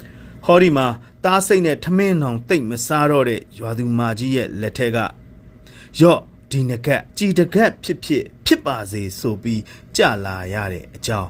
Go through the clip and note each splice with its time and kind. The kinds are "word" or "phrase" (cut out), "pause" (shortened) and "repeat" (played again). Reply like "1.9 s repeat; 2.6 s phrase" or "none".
7.1 s pause; 8.3 s pause